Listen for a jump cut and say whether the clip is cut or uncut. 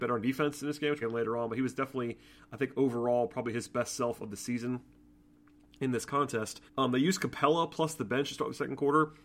cut